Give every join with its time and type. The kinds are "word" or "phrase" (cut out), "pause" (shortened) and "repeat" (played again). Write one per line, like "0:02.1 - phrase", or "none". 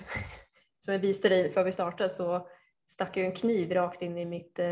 none